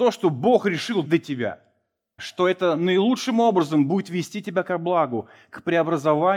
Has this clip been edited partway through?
yes; 2 cuts; at 1.0 s, 2.2 s

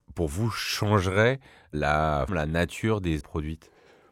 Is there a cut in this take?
yes; 2 cuts; at 2.3 s, 3.2 s

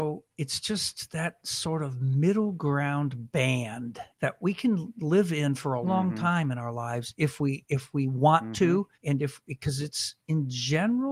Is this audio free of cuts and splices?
no; 3 cuts; at 4.1 s, 5.8 s, 8.9 s

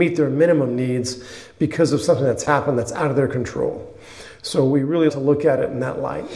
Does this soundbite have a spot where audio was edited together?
yes; 1 cut; at 5.1 s

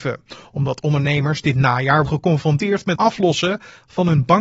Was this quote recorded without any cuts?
no; 2 cuts; at 2.1 s, 3.0 s

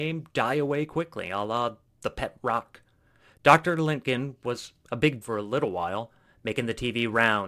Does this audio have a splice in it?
yes; 1 cut; at 5.2 s

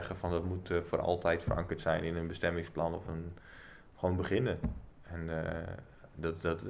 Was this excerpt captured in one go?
yes; 0 cuts

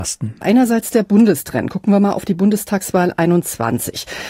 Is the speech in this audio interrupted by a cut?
no; 0 cuts

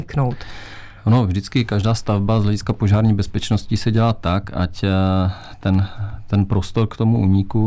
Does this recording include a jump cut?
no; 0 cuts

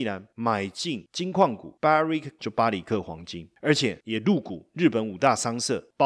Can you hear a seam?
yes; 1 cut; at 2.4 s

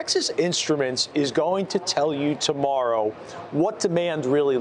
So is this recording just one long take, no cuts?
yes; 0 cuts

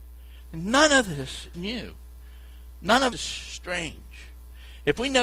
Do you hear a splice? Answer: yes; 2 cuts; at 1.5 s, 3.1 s

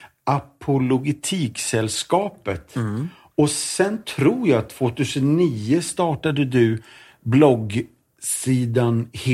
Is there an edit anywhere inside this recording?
no; 0 cuts

